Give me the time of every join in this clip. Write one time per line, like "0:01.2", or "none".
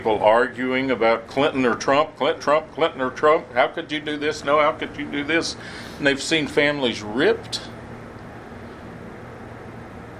0:02.4